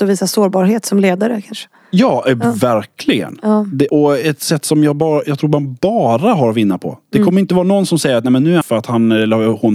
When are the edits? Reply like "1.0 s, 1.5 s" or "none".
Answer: 3.9 s, 8.6 s

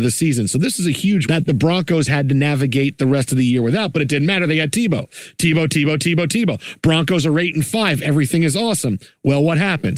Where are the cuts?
1.2 s

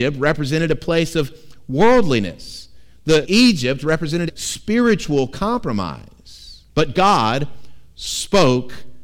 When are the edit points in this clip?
3.2 s, 4.3 s, 6.7 s

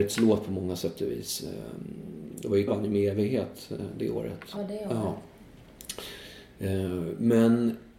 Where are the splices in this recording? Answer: 2.7 s, 4.6 s

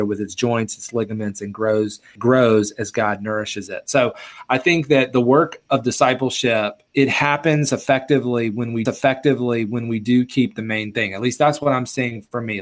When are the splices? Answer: 2.2 s, 8.9 s

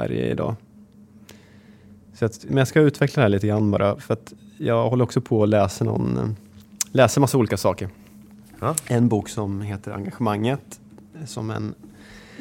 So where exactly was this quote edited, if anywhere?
2.5 s

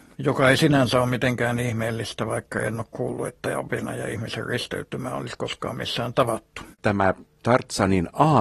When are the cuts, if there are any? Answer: 6.7 s

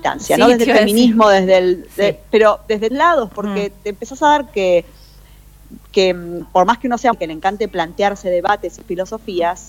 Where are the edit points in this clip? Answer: 2.9 s, 4.5 s, 6.4 s, 7.1 s

